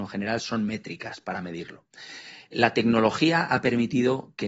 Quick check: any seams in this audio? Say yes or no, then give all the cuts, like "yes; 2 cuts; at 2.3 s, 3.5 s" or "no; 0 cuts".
no; 0 cuts